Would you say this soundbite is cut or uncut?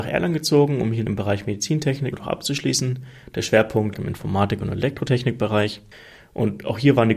cut